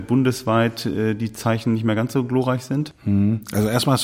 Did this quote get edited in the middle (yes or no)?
no